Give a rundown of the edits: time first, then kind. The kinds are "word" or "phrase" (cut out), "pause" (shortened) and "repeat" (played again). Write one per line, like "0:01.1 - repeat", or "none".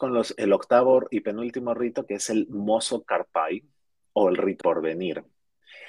0:04.6 - word